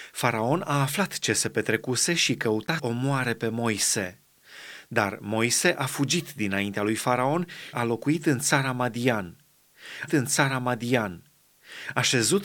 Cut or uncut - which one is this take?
cut